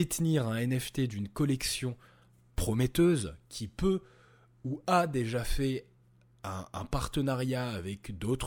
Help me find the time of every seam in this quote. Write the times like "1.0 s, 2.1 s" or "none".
none